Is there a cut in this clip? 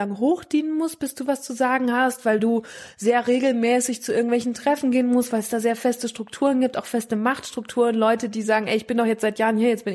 no; 0 cuts

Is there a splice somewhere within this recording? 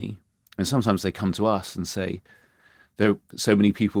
no; 0 cuts

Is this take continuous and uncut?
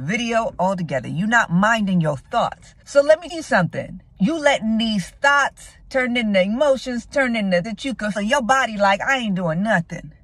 no; 6 cuts; at 2.8 s, 3.3 s, 4.1 s, 5.8 s, 7.6 s, 8.2 s

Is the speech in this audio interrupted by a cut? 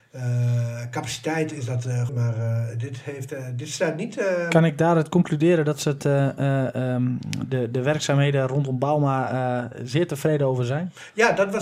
yes; 1 cut; at 2.1 s

